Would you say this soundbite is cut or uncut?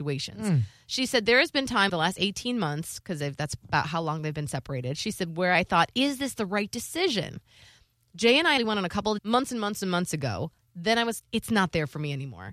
cut